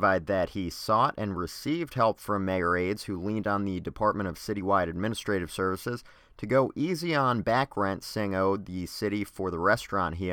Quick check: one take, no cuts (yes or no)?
yes